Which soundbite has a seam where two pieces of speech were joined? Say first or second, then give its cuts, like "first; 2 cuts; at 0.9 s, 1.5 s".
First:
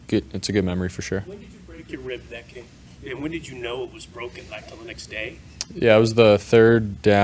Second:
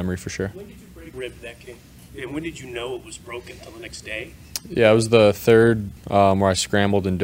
second; 3 cuts; at 1.1 s, 3.6 s, 6.0 s